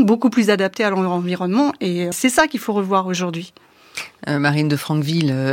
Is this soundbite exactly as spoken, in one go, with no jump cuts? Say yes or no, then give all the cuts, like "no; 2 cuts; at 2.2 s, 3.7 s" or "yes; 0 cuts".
no; 1 cut; at 2.1 s